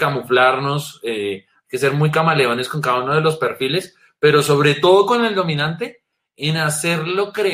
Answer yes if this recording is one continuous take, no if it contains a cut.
yes